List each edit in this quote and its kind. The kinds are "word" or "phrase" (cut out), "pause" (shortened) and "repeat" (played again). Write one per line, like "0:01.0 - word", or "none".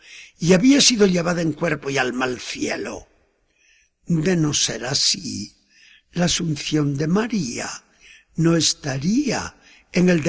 none